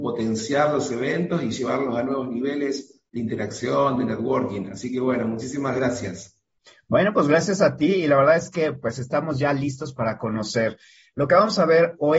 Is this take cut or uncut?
uncut